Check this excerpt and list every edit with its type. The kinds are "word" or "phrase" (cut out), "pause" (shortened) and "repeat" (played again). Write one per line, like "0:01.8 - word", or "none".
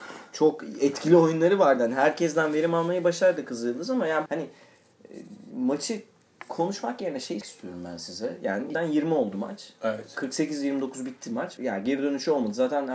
0:04.3 - word
0:07.4 - word
0:08.7 - phrase
0:11.6 - phrase